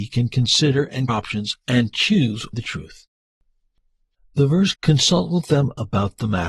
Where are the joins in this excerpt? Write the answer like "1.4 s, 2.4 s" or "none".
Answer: 1.1 s, 2.5 s, 4.7 s